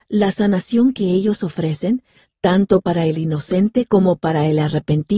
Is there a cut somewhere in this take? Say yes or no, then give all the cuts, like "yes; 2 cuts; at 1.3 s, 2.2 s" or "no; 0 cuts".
no; 0 cuts